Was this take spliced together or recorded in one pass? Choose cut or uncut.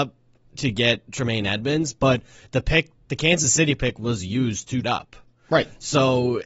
cut